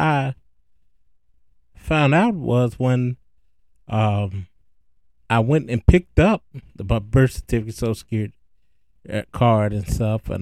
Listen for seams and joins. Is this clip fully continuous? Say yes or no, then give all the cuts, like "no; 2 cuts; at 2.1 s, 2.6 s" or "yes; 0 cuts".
no; 1 cut; at 4.6 s